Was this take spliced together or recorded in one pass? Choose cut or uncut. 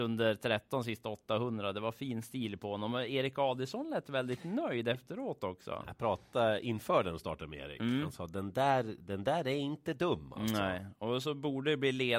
uncut